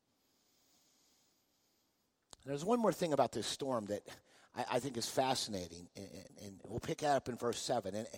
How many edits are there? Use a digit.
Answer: 0